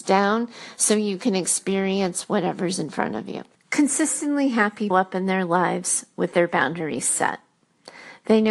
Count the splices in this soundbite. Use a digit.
2